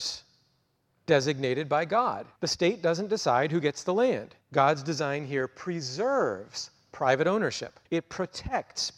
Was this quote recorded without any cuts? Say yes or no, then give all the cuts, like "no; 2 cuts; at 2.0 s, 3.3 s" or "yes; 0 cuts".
no; 3 cuts; at 2.4 s, 4.4 s, 7.9 s